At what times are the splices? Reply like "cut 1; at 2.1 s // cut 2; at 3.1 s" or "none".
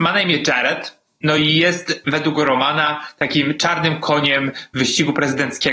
none

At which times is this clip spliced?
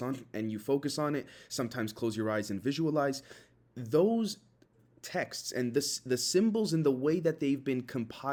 none

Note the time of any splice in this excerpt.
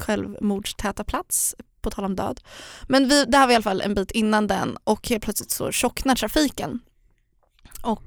none

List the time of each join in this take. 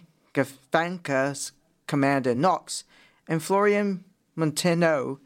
none

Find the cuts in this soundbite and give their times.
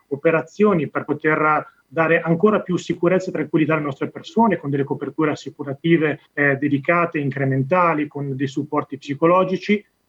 cut 1; at 6.2 s

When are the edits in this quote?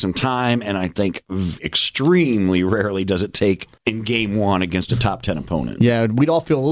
cut 1; at 3.8 s

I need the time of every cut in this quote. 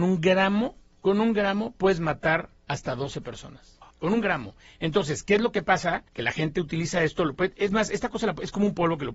cut 1; at 2.6 s // cut 2; at 3.9 s // cut 3; at 6.1 s

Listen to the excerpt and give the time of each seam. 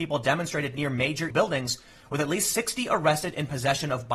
cut 1; at 1.3 s

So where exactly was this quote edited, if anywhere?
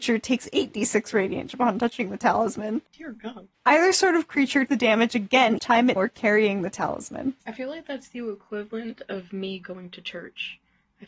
cut 1; at 1.5 s // cut 2; at 2.9 s // cut 3; at 3.5 s // cut 4; at 4.7 s // cut 5; at 5.6 s // cut 6; at 6.0 s // cut 7; at 7.4 s

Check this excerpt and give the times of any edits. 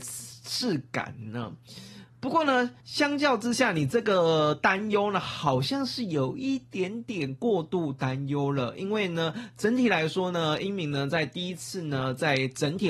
cut 1; at 2.8 s

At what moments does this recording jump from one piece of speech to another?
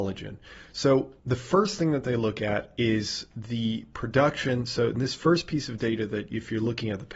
cut 1; at 1.2 s

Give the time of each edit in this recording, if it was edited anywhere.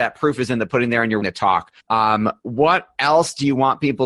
cut 1; at 1.2 s // cut 2; at 1.8 s

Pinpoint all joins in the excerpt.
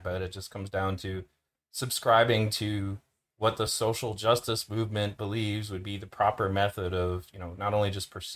none

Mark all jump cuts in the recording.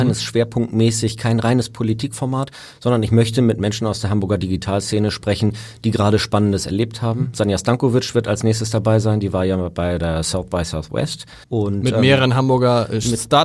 cut 1; at 11.4 s

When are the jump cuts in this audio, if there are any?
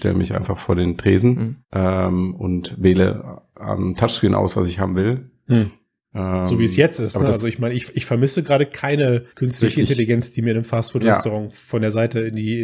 cut 1; at 1.6 s // cut 2; at 9.3 s

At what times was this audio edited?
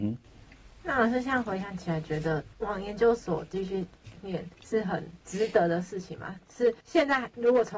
cut 1; at 2.5 s // cut 2; at 4.5 s // cut 3; at 5.2 s // cut 4; at 6.8 s

